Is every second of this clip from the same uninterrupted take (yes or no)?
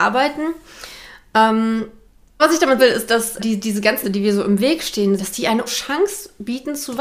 no